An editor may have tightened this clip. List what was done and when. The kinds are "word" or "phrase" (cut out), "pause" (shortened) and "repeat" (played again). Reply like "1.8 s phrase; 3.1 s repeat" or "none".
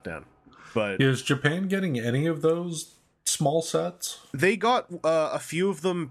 none